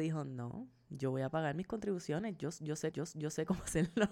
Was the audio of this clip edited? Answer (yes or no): yes